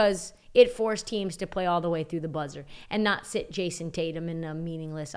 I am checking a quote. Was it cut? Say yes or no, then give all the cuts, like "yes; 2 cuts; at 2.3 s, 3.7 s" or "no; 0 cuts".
no; 0 cuts